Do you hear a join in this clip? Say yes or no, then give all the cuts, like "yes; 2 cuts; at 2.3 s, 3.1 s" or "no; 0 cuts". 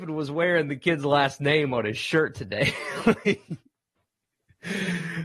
no; 0 cuts